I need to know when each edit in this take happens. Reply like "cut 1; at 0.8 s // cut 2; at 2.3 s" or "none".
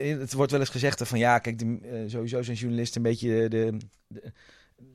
cut 1; at 3.9 s

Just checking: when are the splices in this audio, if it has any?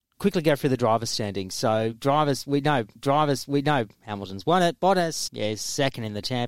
cut 1; at 3.0 s // cut 2; at 5.3 s

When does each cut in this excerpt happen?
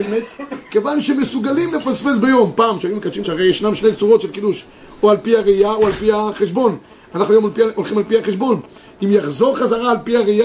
cut 1; at 3.2 s

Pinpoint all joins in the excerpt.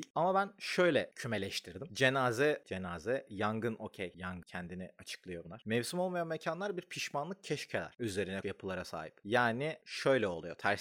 cut 1; at 1.1 s // cut 2; at 2.6 s // cut 3; at 8.4 s

